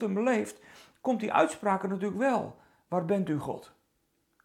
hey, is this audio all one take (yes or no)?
yes